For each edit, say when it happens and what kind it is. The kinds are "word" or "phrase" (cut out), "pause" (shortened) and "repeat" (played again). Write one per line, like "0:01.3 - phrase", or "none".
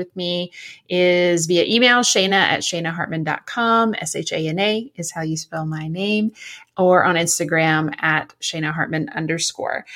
none